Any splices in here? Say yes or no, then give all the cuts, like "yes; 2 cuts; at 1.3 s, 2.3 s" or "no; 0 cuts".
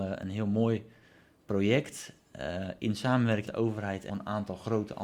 yes; 2 cuts; at 3.5 s, 4.1 s